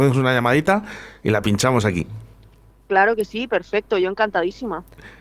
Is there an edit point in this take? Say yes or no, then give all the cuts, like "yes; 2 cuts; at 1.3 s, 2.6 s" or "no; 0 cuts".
no; 0 cuts